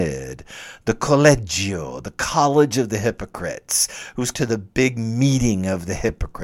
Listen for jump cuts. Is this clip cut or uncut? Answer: cut